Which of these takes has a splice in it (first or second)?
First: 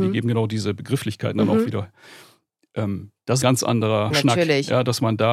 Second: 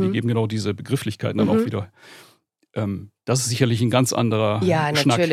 first